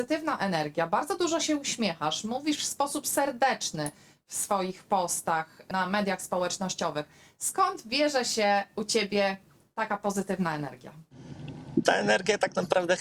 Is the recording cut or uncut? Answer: uncut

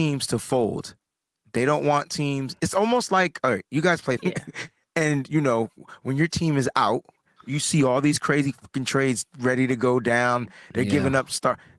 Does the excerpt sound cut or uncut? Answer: cut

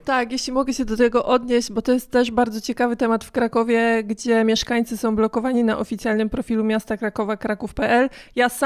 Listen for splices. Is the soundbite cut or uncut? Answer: uncut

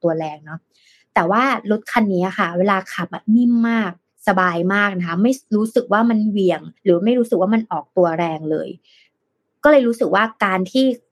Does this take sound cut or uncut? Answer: cut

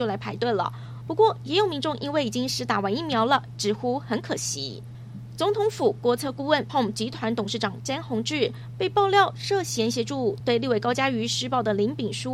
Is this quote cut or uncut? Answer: cut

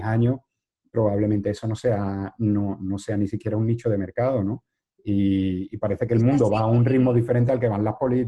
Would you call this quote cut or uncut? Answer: uncut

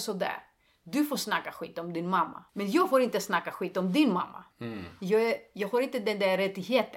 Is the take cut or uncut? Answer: cut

